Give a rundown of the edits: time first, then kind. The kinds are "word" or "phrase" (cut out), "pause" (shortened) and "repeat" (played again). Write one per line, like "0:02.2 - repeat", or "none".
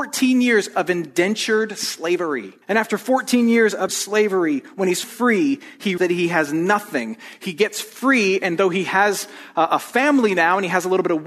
0:02.6 - pause
0:03.9 - word
0:05.0 - word
0:06.0 - word